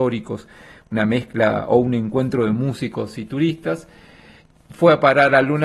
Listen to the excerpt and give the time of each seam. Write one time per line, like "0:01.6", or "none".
none